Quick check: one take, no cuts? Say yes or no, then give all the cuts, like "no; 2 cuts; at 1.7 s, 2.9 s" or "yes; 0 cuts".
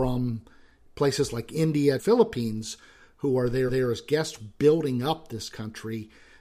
no; 3 cuts; at 2.0 s, 3.7 s, 4.4 s